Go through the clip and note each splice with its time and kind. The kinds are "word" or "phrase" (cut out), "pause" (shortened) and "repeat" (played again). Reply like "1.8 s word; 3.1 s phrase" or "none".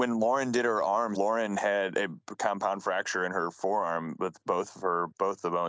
1.1 s word